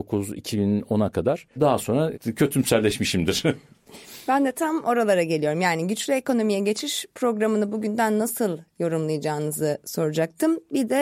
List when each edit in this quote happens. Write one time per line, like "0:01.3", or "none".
none